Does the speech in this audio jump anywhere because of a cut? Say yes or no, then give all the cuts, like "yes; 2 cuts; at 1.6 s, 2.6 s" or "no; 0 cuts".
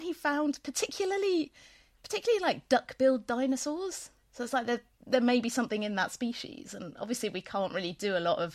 no; 0 cuts